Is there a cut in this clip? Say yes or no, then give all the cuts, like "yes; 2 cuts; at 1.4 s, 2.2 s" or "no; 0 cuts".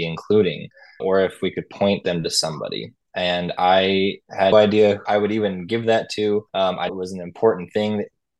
yes; 5 cuts; at 1.0 s, 4.5 s, 5.1 s, 6.5 s, 6.9 s